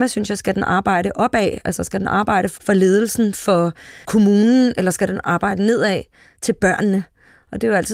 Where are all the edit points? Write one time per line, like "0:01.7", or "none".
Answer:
0:02.6
0:04.0